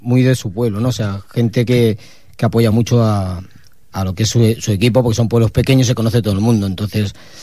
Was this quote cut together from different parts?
no; 0 cuts

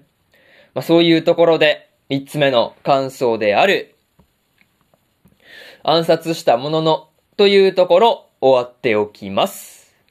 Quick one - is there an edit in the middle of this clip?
no; 0 cuts

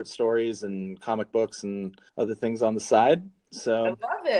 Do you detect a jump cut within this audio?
yes; 1 cut; at 2.1 s

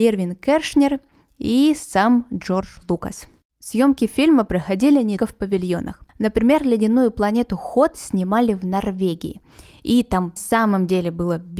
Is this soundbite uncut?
no; 4 cuts; at 3.4 s, 5.2 s, 6.1 s, 10.4 s

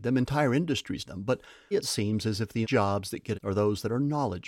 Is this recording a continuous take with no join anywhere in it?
no; 4 cuts; at 1.0 s, 1.7 s, 2.6 s, 3.3 s

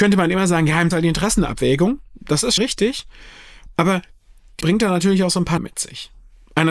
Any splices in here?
yes; 4 cuts; at 0.9 s, 2.6 s, 4.6 s, 5.6 s

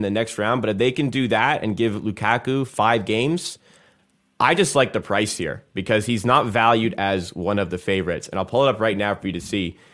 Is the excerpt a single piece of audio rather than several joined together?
yes; 0 cuts

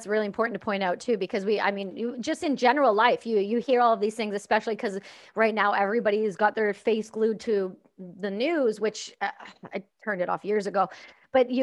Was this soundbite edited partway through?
no; 0 cuts

